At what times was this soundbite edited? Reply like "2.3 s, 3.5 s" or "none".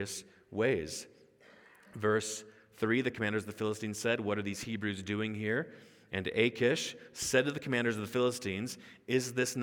none